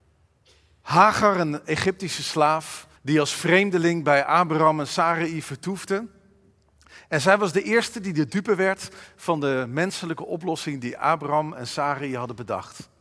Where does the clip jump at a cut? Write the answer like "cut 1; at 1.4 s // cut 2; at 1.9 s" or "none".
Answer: cut 1; at 3.0 s